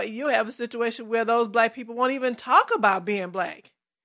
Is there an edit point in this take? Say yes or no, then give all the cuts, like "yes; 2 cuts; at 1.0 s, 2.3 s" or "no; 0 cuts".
no; 0 cuts